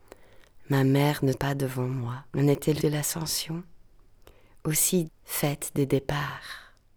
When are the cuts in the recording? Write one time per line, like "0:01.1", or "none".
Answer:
0:01.3
0:02.3
0:02.8
0:05.1